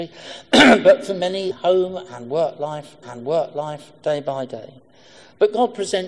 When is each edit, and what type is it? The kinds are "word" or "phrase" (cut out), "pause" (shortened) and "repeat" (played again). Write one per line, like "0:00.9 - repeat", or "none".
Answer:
0:01.5 - phrase
0:03.0 - repeat